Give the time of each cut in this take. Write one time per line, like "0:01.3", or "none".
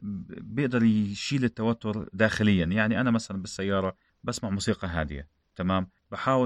none